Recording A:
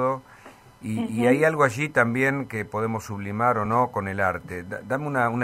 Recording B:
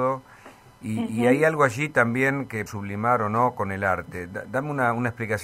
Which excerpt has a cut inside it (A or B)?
B